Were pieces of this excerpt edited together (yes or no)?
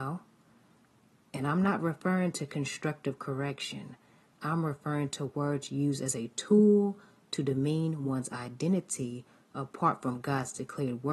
no